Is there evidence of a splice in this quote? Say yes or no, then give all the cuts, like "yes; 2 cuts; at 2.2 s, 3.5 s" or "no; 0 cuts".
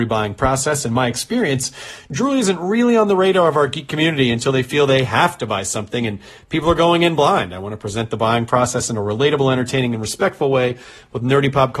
no; 0 cuts